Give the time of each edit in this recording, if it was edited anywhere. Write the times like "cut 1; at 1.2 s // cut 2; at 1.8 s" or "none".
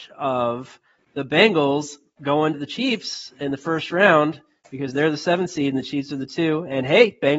cut 1; at 2.5 s

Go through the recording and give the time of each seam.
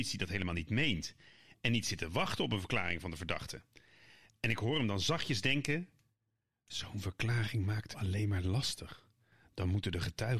cut 1; at 7.9 s

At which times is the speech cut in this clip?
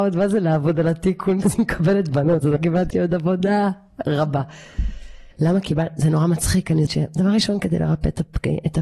cut 1; at 1.4 s // cut 2; at 2.6 s // cut 3; at 2.9 s // cut 4; at 5.3 s // cut 5; at 6.9 s

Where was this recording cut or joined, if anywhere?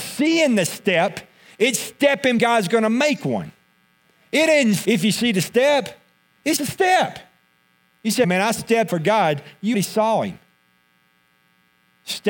cut 1; at 2.4 s // cut 2; at 4.8 s // cut 3; at 6.6 s // cut 4; at 8.2 s // cut 5; at 8.9 s // cut 6; at 9.7 s

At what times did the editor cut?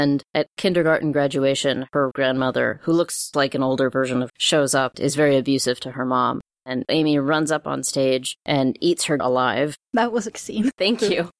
cut 1; at 2.1 s // cut 2; at 3.3 s // cut 3; at 4.3 s // cut 4; at 4.9 s // cut 5; at 6.9 s // cut 6; at 9.2 s // cut 7; at 10.3 s

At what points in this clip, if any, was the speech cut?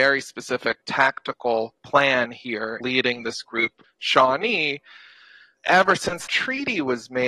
cut 1; at 1.8 s // cut 2; at 2.8 s // cut 3; at 3.8 s // cut 4; at 5.6 s // cut 5; at 6.3 s

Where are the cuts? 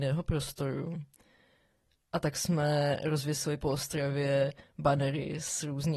none

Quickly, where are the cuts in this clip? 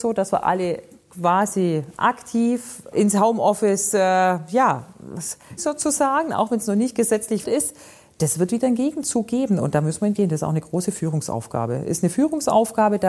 cut 1; at 2.9 s // cut 2; at 5.6 s // cut 3; at 7.4 s // cut 4; at 10.2 s

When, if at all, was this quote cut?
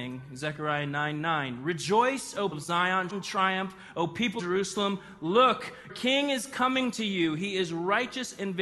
cut 1; at 2.5 s // cut 2; at 3.1 s // cut 3; at 4.4 s // cut 4; at 5.9 s

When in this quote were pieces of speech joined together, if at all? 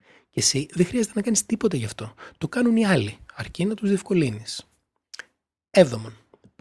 none

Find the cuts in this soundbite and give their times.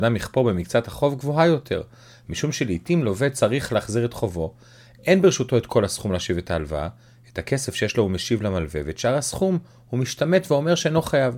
none

